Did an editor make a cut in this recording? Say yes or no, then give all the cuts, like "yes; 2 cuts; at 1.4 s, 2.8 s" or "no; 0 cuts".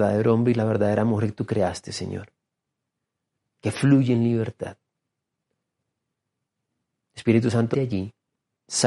yes; 1 cut; at 7.7 s